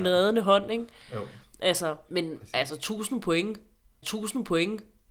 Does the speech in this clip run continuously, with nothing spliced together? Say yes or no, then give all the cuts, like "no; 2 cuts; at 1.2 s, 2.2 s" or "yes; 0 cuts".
no; 2 cuts; at 2.1 s, 4.0 s